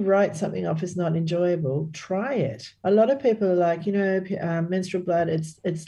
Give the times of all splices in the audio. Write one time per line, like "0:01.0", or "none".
0:02.8